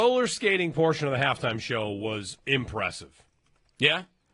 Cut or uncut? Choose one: cut